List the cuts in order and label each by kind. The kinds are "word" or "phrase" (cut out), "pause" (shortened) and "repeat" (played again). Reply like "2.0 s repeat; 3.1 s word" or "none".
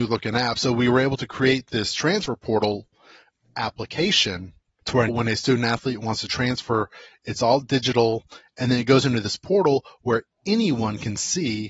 5.1 s word